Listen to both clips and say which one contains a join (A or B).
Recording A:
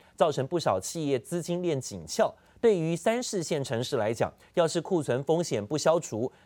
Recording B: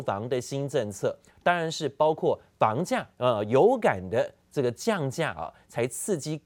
B